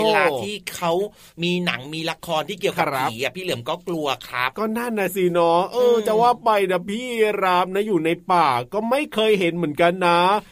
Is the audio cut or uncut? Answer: uncut